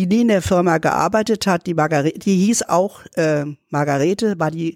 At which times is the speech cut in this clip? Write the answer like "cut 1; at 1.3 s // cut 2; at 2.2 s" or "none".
none